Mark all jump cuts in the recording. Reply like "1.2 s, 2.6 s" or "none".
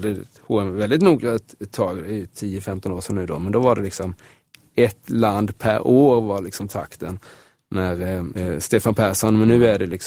none